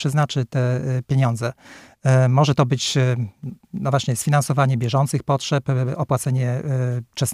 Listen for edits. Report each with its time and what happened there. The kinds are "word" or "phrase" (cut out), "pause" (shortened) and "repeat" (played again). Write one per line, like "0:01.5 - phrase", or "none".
0:03.6 - pause